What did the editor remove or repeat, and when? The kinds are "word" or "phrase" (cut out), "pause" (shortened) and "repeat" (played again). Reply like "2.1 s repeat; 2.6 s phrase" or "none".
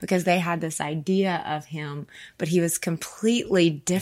none